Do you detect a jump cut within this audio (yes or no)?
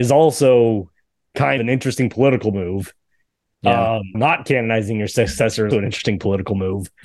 yes